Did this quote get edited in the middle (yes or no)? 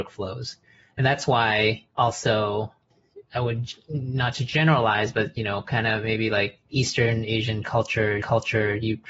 yes